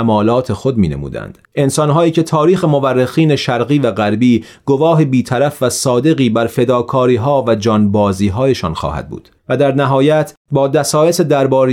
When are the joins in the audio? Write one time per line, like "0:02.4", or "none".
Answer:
0:01.4
0:09.4